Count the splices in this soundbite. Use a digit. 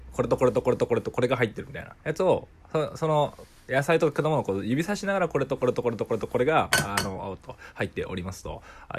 1